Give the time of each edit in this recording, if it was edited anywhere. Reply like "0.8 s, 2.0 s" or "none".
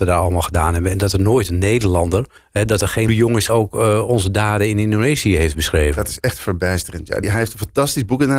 2.4 s, 3.1 s, 3.5 s, 7.2 s